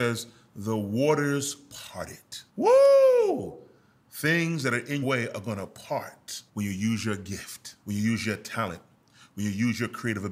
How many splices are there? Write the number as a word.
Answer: four